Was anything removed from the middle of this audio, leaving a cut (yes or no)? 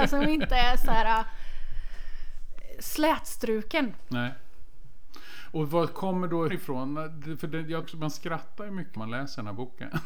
yes